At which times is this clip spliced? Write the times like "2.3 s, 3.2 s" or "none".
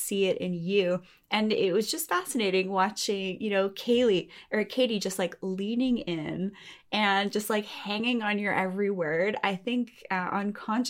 none

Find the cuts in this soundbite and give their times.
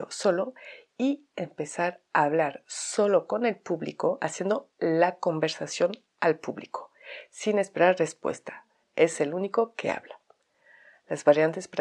none

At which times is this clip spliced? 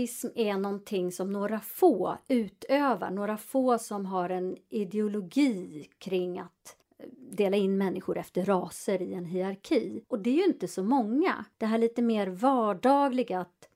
10.0 s, 11.5 s

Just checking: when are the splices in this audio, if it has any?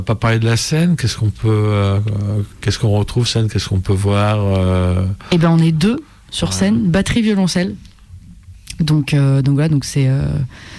2.5 s, 3.3 s

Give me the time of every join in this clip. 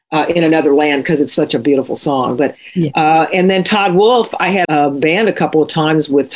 1.4 s, 4.6 s

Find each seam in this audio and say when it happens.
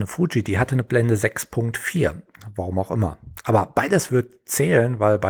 4.1 s

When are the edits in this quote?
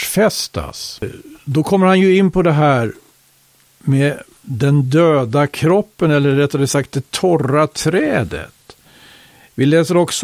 none

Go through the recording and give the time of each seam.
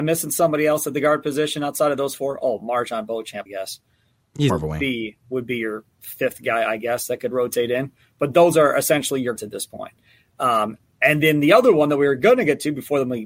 3.5 s, 4.5 s, 9.4 s

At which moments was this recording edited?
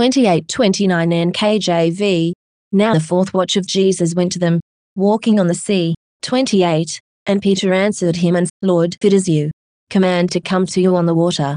2.9 s, 3.7 s, 8.5 s, 9.0 s, 10.3 s

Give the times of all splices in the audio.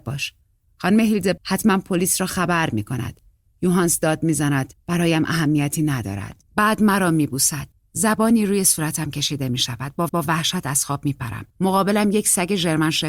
1.4 s, 6.5 s, 7.7 s, 10.1 s, 11.5 s

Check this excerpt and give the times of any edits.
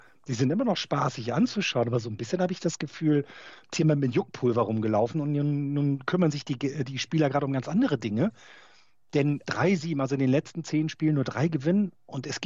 3.7 s, 9.4 s

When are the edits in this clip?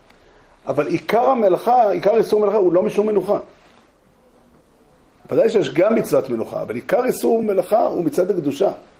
none

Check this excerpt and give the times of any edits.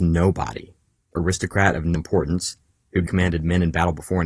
1.2 s, 1.9 s, 3.1 s

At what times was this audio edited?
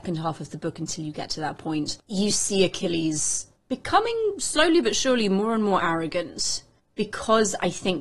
none

